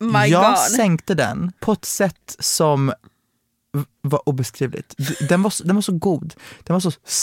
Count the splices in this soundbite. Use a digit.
1